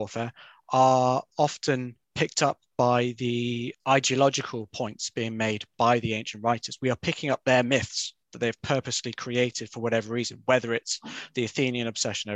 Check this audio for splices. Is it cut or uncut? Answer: cut